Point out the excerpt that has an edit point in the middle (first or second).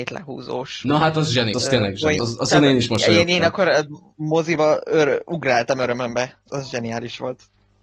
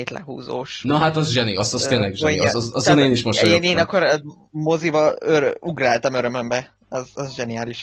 first